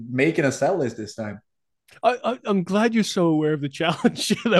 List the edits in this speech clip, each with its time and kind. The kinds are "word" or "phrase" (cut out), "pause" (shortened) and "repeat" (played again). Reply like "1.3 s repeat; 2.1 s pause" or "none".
none

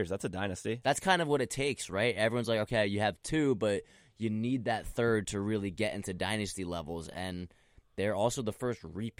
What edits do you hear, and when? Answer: none

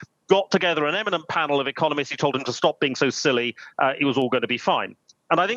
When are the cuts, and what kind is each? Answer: none

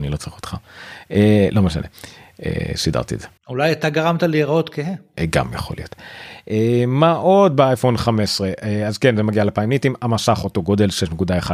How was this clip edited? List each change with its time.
3.4 s pause

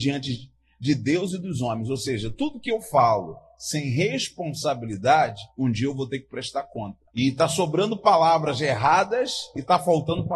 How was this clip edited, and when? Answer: 5.5 s pause; 7.1 s pause

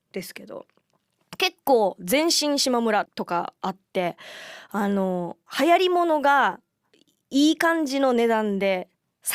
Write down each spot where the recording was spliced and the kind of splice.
5.5 s pause; 6.9 s pause

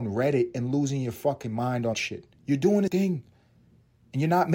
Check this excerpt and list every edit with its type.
1.9 s word; 2.4 s pause; 2.9 s word

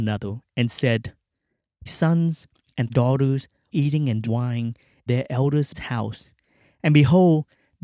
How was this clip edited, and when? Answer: 1.9 s word; 2.9 s word; 3.7 s word; 4.2 s word; 5.1 s word; 5.7 s word

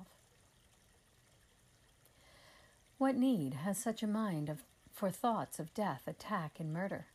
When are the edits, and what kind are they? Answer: none

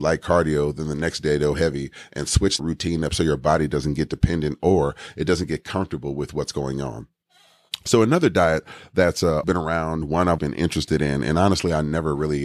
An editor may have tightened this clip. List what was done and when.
2.6 s word; 9.4 s word; 10.4 s word

